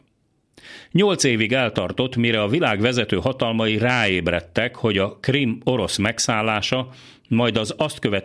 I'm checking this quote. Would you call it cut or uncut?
uncut